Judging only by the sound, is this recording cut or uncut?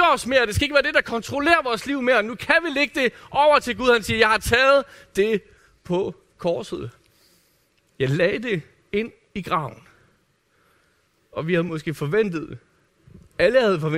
uncut